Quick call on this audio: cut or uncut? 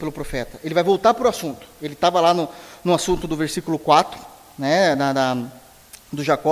uncut